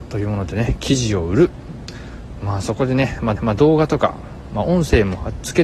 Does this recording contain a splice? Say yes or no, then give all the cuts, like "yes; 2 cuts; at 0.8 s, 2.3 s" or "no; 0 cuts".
yes; 1 cut; at 3.4 s